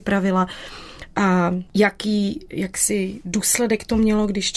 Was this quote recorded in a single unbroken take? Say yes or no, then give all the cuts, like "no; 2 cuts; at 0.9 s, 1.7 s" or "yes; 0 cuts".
no; 1 cut; at 1.7 s